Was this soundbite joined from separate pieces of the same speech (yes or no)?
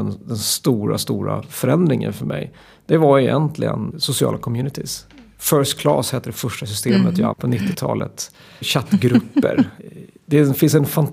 yes